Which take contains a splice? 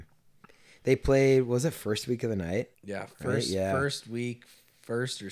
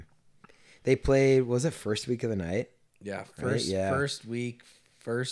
first; 1 cut; at 2.7 s

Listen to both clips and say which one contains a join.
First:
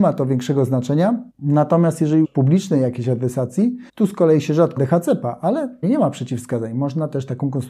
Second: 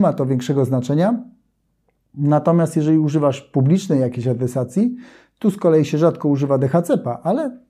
first; 5 cuts; at 1.3 s, 2.2 s, 3.9 s, 4.8 s, 5.8 s

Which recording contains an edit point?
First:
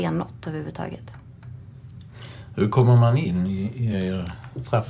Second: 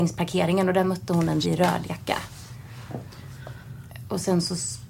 second; 1 cut; at 1.4 s

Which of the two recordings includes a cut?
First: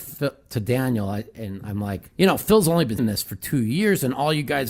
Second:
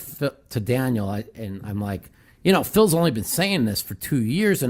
first; 2 cuts; at 2.1 s, 3.0 s

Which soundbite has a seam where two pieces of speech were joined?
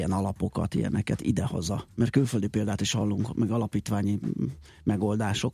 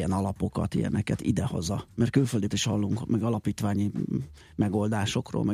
second; 1 cut; at 2.5 s

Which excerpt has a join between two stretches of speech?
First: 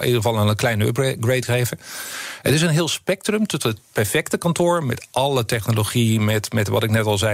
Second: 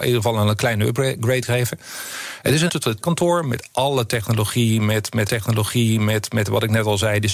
second; 3 cuts; at 2.7 s, 3.0 s, 5.3 s

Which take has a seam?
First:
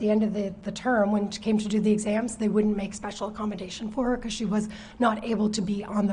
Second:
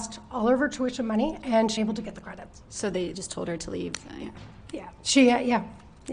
second; 3 cuts; at 1.8 s, 2.6 s, 3.1 s

